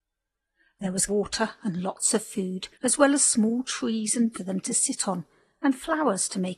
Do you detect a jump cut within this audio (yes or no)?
yes